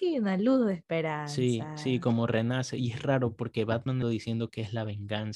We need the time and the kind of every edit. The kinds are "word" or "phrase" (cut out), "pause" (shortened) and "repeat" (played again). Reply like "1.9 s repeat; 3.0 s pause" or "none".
4.0 s word